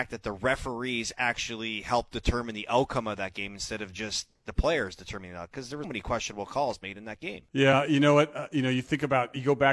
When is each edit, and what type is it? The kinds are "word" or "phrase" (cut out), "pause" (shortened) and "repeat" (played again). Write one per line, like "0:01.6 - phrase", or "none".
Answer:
0:05.8 - word
0:07.5 - pause